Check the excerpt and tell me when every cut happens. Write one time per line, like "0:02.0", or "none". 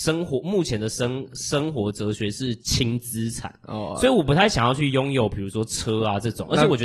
0:02.6